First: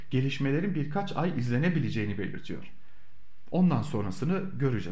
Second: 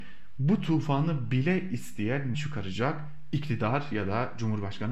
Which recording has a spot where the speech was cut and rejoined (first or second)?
second